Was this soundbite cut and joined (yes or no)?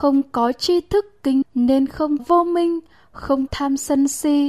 yes